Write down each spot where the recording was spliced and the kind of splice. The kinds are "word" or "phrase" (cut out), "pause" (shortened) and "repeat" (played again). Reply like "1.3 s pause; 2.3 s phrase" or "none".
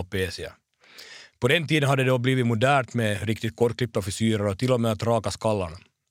none